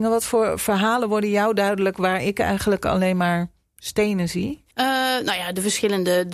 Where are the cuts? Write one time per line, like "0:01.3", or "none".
0:04.7